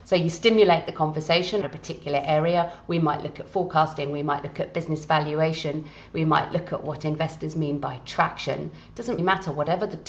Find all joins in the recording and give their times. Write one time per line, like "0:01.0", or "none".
0:01.6
0:09.2